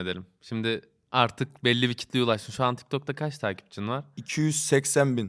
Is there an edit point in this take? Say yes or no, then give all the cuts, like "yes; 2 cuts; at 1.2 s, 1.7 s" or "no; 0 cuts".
no; 0 cuts